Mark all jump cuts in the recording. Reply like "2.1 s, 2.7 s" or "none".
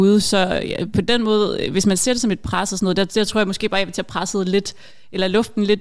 none